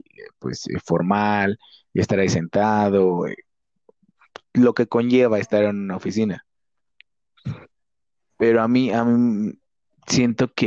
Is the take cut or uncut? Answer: uncut